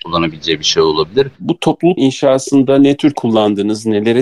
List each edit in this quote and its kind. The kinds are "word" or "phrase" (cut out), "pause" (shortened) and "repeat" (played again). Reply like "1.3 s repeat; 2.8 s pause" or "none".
2.0 s word; 3.1 s word